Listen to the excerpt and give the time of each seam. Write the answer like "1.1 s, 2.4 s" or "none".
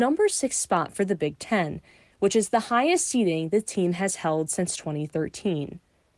none